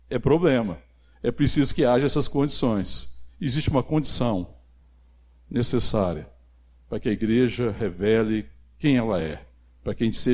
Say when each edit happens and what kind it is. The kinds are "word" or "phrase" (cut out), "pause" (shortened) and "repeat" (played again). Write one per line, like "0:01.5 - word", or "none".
none